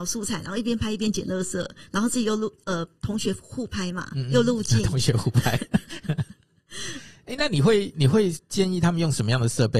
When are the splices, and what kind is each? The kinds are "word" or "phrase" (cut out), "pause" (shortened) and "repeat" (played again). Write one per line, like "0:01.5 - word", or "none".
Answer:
none